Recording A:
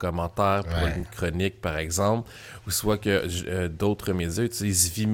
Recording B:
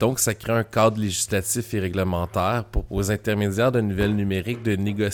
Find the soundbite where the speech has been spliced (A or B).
B